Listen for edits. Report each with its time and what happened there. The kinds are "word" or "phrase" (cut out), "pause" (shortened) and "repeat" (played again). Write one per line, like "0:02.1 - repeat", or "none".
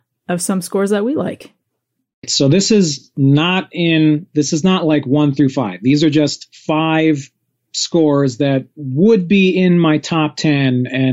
none